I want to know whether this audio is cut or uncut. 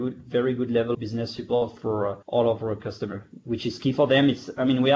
cut